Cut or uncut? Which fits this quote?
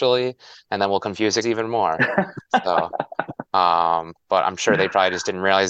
cut